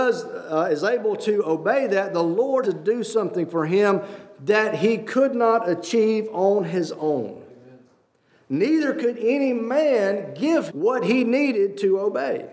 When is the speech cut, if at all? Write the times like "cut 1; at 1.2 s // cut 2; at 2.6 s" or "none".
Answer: cut 1; at 2.6 s // cut 2; at 10.7 s

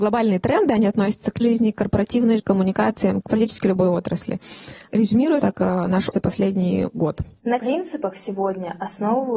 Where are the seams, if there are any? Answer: cut 1; at 1.4 s // cut 2; at 2.4 s // cut 3; at 3.2 s // cut 4; at 5.4 s // cut 5; at 6.1 s // cut 6; at 7.6 s

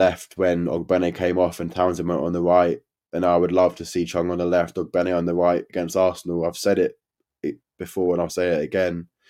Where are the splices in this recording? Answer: none

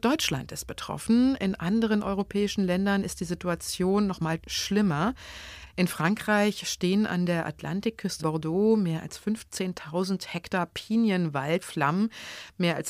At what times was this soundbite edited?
cut 1; at 4.4 s // cut 2; at 8.2 s // cut 3; at 11.6 s

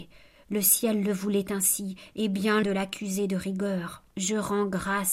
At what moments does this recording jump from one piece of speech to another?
cut 1; at 2.6 s // cut 2; at 4.1 s

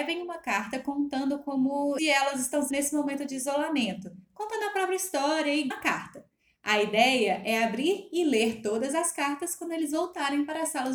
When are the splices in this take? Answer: cut 1; at 2.0 s // cut 2; at 2.7 s // cut 3; at 5.7 s

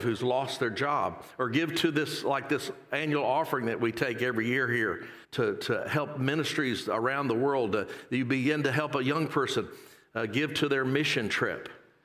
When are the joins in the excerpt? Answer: cut 1; at 5.2 s

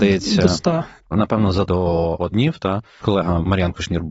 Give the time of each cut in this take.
cut 1; at 1.0 s // cut 2; at 1.7 s // cut 3; at 2.3 s // cut 4; at 3.0 s

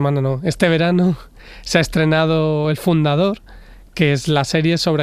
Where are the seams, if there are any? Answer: none

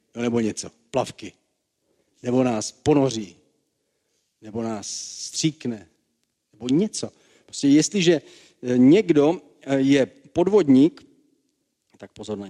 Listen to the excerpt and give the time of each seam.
none

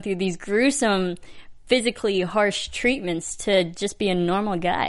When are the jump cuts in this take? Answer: none

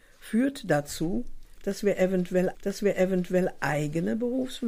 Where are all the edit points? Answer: cut 1; at 2.5 s

